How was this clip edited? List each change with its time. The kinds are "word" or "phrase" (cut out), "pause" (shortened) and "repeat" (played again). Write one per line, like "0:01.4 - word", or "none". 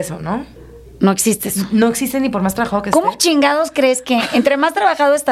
none